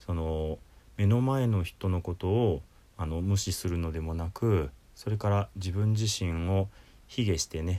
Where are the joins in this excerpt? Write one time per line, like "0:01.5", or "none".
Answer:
none